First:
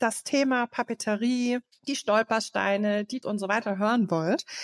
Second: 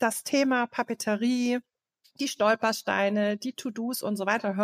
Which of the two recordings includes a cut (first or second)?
first